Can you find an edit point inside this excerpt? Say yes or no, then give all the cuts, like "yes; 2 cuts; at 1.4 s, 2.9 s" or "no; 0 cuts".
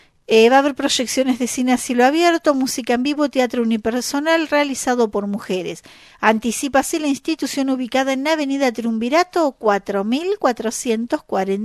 no; 0 cuts